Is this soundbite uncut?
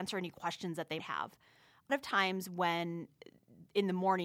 no; 2 cuts; at 1.0 s, 1.9 s

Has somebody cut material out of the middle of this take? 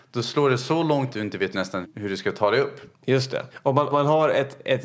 yes; 6 cuts; at 1.1 s, 1.5 s, 1.8 s, 2.9 s, 3.5 s, 3.9 s

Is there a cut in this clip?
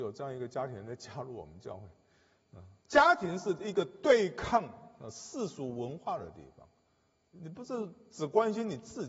yes; 2 cuts; at 2.8 s, 7.3 s

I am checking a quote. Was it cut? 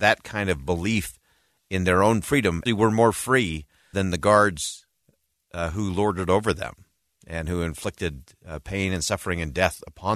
yes; 2 cuts; at 2.7 s, 3.9 s

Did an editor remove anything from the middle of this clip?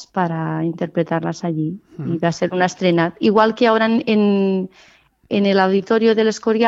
no; 0 cuts

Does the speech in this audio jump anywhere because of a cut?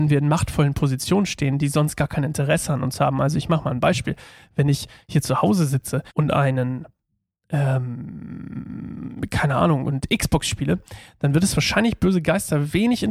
yes; 1 cut; at 6.1 s

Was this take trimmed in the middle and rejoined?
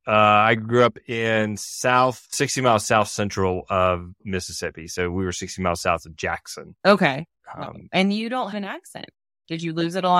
yes; 2 cuts; at 2.3 s, 8.5 s

